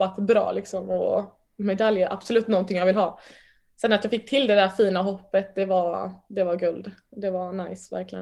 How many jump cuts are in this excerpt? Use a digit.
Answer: 0